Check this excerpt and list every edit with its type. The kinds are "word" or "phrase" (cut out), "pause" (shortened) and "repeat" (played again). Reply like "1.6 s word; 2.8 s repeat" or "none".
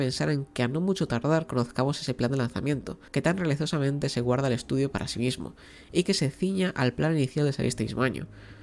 3.1 s pause